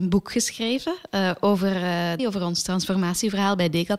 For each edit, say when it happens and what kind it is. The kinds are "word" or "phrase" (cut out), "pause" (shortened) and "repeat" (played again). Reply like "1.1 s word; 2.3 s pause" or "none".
2.2 s phrase